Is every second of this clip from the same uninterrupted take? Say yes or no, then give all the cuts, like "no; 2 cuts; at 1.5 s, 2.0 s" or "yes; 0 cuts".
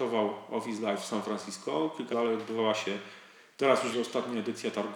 no; 3 cuts; at 0.9 s, 2.1 s, 3.9 s